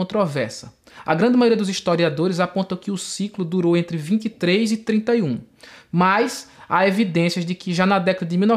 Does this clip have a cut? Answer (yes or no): no